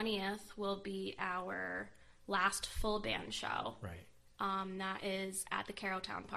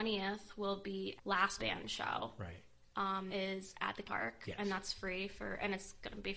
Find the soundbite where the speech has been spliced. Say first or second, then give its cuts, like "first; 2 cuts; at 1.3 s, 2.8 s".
second; 4 cuts; at 1.2 s, 1.6 s, 3.3 s, 4.0 s